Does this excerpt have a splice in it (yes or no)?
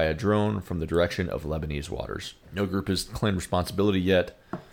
yes